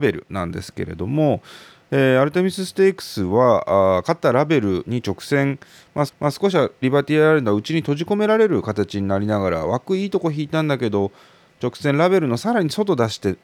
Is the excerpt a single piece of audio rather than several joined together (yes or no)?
no